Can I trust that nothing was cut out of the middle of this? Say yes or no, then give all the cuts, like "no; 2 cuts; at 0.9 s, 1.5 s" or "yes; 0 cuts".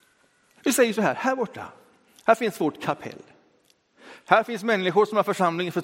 yes; 0 cuts